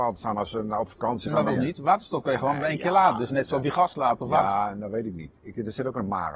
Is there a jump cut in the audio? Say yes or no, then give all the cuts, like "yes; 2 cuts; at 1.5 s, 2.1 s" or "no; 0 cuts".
yes; 1 cut; at 1.5 s